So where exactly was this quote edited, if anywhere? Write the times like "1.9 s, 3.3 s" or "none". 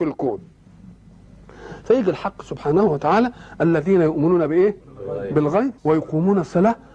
4.8 s, 5.8 s